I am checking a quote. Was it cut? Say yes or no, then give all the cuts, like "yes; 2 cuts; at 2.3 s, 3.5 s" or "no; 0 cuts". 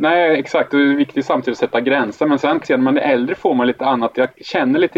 yes; 1 cut; at 2.6 s